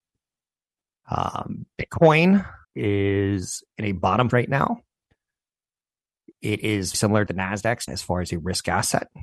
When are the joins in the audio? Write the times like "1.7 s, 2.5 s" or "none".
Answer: 2.6 s, 4.3 s, 6.9 s, 7.3 s, 7.9 s